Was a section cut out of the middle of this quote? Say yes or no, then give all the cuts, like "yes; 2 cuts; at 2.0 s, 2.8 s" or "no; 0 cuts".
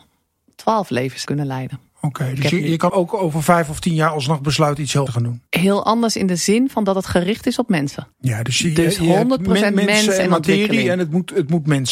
yes; 5 cuts; at 1.3 s, 2.9 s, 5.1 s, 5.5 s, 8.1 s